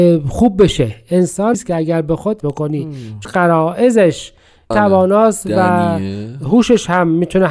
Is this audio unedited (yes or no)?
no